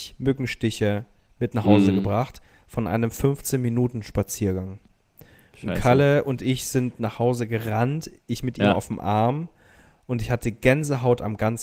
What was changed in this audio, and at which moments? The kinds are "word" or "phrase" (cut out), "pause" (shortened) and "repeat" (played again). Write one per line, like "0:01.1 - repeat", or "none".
none